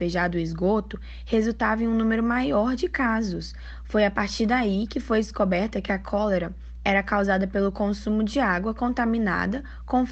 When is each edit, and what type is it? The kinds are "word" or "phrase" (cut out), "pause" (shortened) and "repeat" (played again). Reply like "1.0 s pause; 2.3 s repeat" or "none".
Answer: none